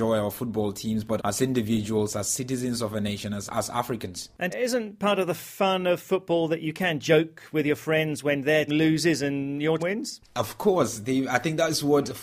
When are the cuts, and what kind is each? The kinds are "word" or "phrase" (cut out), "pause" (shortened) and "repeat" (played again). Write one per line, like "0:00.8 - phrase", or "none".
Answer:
0:01.2 - word
0:03.5 - word
0:04.5 - word
0:08.7 - word
0:09.8 - word